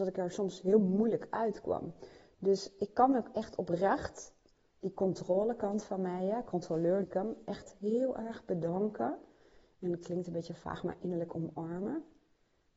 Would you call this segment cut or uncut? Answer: cut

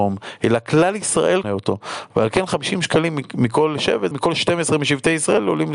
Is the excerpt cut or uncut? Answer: cut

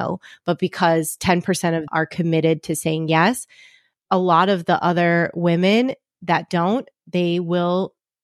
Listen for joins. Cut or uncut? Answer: cut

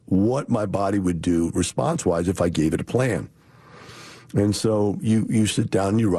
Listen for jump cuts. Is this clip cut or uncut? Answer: uncut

